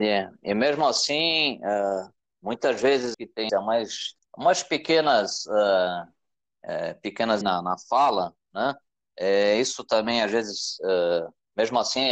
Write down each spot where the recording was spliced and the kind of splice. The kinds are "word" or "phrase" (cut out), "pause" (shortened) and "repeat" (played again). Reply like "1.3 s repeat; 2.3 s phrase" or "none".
3.1 s word; 3.5 s phrase; 4.2 s pause; 7.4 s phrase